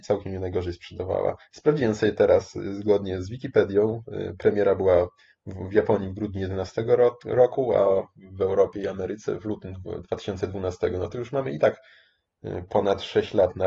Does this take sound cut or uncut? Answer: uncut